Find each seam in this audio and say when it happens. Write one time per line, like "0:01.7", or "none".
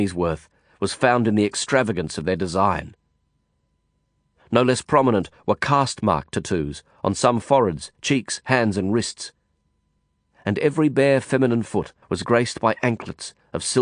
0:12.0